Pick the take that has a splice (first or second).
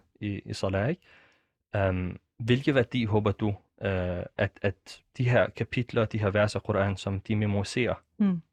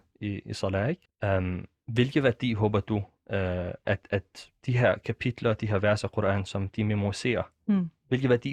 second